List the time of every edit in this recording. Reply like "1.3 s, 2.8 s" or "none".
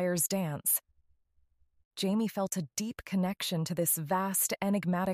none